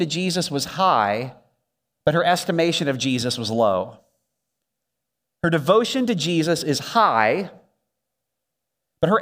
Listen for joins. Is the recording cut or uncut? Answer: uncut